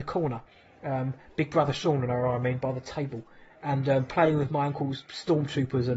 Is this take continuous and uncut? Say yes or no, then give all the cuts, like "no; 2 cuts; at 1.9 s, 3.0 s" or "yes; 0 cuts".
yes; 0 cuts